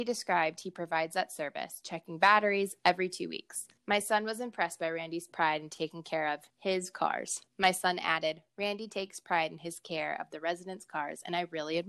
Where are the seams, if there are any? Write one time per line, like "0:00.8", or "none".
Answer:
0:03.8
0:06.5
0:07.5